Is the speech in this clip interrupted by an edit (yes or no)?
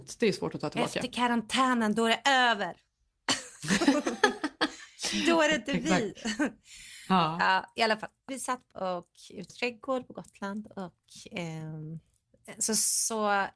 yes